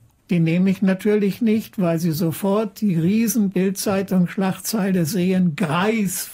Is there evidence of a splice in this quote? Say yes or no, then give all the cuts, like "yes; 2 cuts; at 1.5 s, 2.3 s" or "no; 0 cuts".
no; 0 cuts